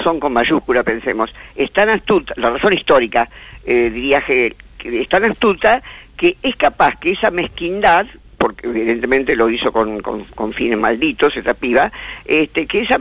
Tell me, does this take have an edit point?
no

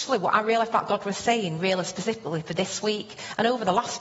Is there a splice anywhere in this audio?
no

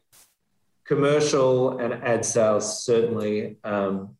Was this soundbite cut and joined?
no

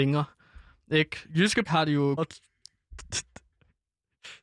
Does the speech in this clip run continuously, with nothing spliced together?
no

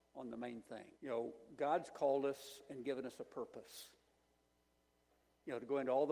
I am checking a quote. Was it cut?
yes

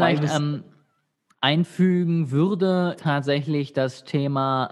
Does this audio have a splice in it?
yes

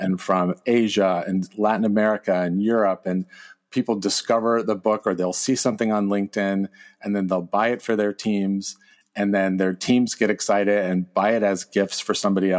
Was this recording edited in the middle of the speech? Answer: no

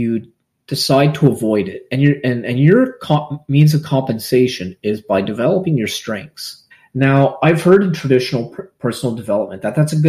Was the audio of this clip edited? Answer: yes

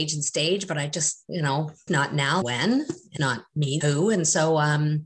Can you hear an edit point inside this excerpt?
yes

